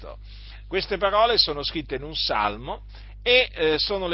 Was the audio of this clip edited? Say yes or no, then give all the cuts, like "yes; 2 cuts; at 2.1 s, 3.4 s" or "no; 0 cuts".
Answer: no; 0 cuts